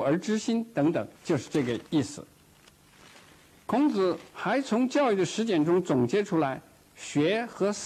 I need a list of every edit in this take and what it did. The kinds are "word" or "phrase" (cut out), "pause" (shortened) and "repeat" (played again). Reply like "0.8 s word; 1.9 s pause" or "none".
1.1 s pause; 1.8 s pause; 4.3 s pause